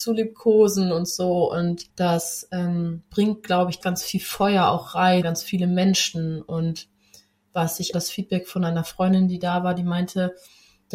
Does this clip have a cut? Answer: yes; 4 cuts; at 1.9 s, 3.8 s, 5.2 s, 7.9 s

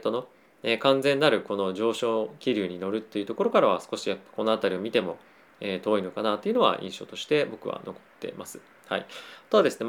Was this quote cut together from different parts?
no; 0 cuts

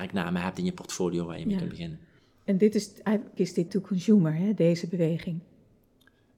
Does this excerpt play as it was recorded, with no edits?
no; 2 cuts; at 3.4 s, 3.7 s

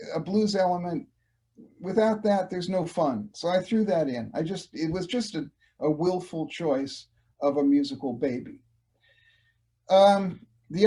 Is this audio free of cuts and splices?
yes; 0 cuts

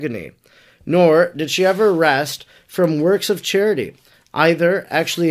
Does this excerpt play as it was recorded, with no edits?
yes; 0 cuts

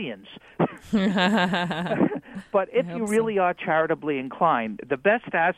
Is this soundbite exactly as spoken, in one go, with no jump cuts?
yes; 0 cuts

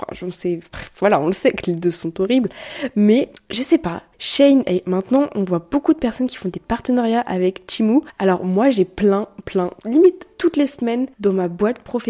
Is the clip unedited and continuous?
yes; 0 cuts

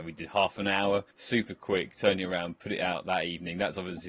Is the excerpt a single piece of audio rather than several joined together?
yes; 0 cuts

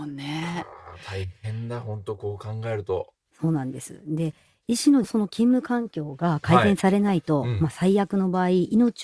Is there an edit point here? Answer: no; 0 cuts

